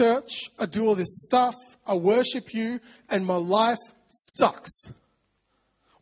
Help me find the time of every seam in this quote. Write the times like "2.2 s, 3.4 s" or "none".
none